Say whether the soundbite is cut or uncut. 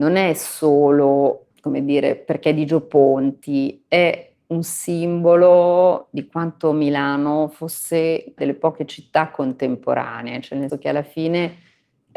cut